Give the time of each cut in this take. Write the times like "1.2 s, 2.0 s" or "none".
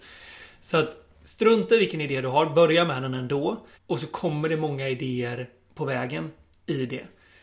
1.1 s, 3.7 s